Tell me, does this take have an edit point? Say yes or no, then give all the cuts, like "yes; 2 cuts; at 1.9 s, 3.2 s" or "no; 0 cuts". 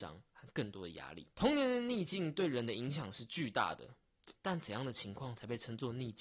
yes; 2 cuts; at 1.3 s, 4.4 s